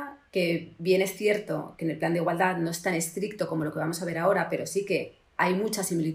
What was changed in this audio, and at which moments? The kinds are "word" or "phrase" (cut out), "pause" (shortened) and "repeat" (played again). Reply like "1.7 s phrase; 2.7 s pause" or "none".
none